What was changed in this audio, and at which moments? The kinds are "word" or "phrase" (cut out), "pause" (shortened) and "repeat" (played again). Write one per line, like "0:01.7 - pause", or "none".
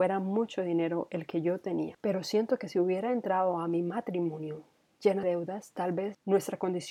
0:05.2 - word